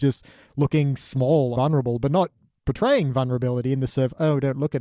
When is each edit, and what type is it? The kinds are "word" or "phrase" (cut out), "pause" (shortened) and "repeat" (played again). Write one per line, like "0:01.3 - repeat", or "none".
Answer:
0:01.6 - word
0:03.9 - word